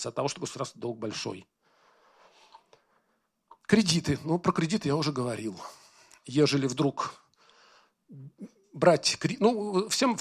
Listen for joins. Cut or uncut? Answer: uncut